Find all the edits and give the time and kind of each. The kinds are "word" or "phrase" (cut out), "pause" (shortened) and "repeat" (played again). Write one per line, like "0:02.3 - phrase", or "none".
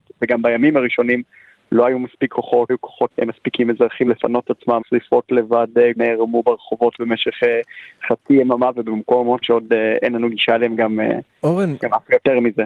0:02.7 - word
0:03.1 - word
0:04.1 - word
0:04.8 - word
0:06.0 - word
0:09.4 - word